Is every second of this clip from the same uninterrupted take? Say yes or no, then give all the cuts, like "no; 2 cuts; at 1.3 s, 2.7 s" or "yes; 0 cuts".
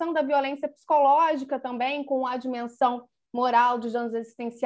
yes; 0 cuts